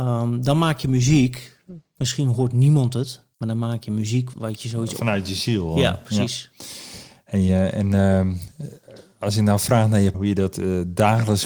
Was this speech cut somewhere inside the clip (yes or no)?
yes